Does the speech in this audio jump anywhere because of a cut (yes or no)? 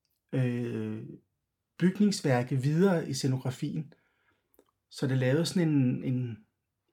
no